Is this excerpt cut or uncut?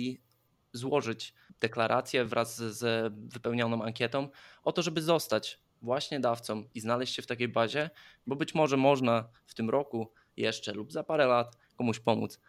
uncut